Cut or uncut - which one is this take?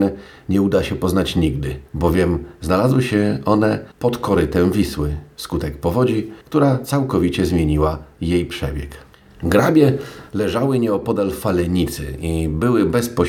cut